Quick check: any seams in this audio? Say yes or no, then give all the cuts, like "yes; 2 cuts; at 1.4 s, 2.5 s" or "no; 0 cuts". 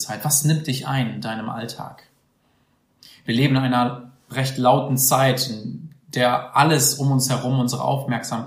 no; 0 cuts